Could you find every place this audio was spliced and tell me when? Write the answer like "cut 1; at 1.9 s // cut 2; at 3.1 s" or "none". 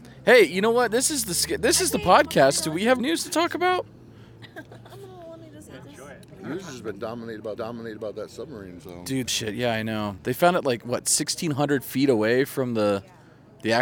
cut 1; at 3.0 s // cut 2; at 7.6 s // cut 3; at 9.3 s